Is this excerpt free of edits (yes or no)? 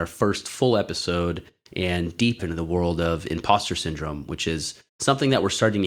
no